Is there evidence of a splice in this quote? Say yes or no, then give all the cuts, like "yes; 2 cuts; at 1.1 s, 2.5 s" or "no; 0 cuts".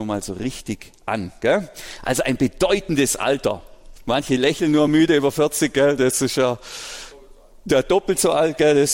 no; 0 cuts